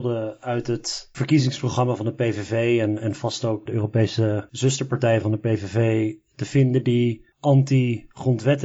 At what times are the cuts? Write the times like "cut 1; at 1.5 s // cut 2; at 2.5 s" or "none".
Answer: cut 1; at 3.7 s // cut 2; at 7.3 s